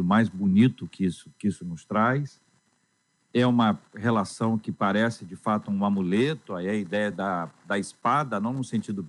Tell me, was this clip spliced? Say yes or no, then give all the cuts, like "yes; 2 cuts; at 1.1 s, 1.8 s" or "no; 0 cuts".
no; 0 cuts